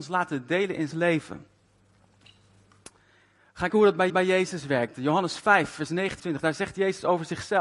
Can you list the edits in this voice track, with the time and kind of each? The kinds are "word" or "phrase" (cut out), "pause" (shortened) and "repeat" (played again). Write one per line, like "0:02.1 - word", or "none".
0:00.9 - phrase
0:03.7 - word
0:04.1 - repeat
0:06.2 - word